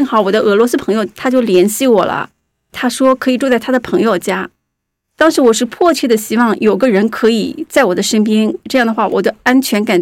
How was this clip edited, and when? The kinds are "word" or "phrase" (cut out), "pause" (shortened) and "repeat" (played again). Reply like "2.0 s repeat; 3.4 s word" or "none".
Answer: none